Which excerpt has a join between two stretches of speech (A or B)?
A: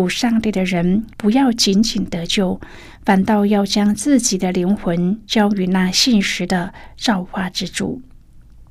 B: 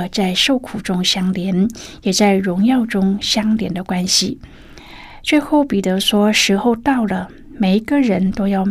A